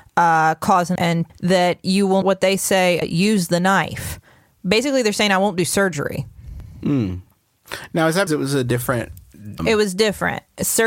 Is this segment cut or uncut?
cut